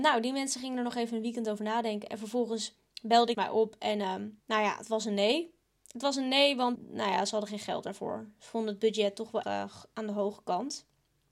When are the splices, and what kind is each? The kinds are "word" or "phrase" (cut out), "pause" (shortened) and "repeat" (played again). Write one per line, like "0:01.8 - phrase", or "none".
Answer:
0:03.3 - phrase
0:04.4 - pause
0:05.6 - pause
0:06.8 - word
0:09.4 - word